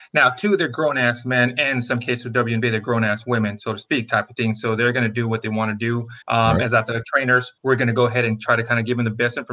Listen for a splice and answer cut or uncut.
cut